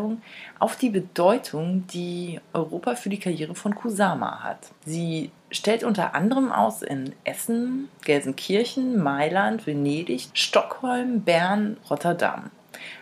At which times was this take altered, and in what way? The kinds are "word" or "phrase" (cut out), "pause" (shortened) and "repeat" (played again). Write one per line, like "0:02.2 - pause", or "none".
0:04.8 - pause
0:10.3 - word
0:11.8 - word